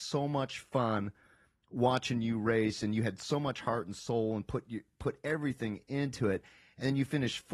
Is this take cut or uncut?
uncut